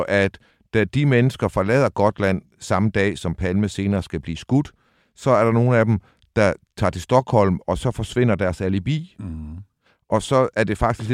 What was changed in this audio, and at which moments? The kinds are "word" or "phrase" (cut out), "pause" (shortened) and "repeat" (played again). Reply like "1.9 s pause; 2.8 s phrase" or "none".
none